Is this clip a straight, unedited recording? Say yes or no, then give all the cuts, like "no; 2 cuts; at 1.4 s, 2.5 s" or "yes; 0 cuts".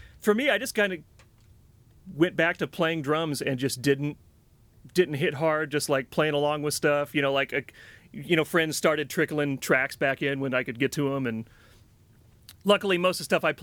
yes; 0 cuts